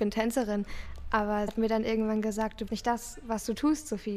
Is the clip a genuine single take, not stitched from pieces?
no; 2 cuts; at 1.5 s, 2.7 s

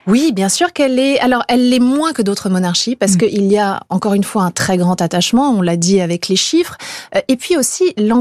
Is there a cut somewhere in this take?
no; 0 cuts

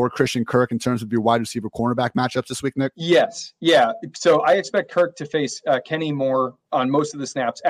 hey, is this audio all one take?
yes; 0 cuts

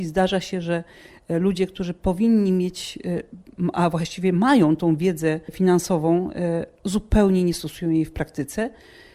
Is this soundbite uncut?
yes; 0 cuts

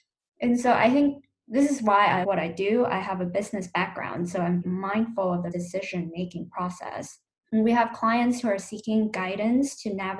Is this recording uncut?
no; 4 cuts; at 2.2 s, 4.6 s, 5.5 s, 7.3 s

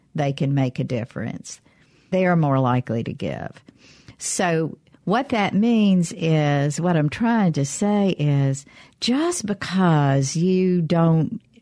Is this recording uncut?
no; 1 cut; at 2.1 s

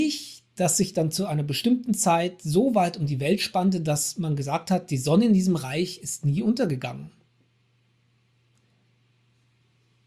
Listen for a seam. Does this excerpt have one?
no; 0 cuts

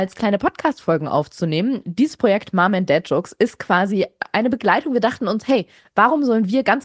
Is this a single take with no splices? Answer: yes; 0 cuts

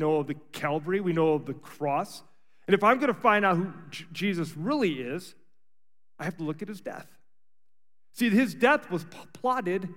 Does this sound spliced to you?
no; 0 cuts

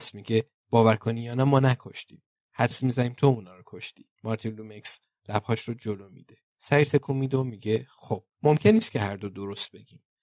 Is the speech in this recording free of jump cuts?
no; 3 cuts; at 4.1 s, 6.5 s, 8.3 s

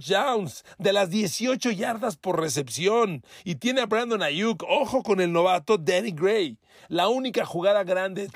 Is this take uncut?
yes; 0 cuts

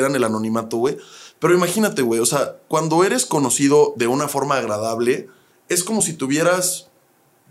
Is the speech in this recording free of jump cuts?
yes; 0 cuts

